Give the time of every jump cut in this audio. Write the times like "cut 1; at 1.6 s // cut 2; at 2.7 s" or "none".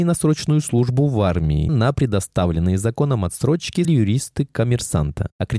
cut 1; at 1.7 s // cut 2; at 3.8 s